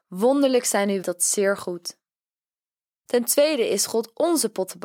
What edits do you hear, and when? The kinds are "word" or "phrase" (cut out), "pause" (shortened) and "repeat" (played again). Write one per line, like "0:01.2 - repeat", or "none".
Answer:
0:01.0 - phrase